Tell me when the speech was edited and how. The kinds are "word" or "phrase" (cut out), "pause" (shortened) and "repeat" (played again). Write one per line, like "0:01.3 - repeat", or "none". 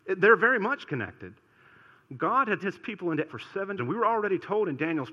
0:02.6 - word
0:03.3 - word
0:03.8 - word